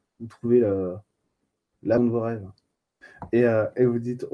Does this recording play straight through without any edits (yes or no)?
no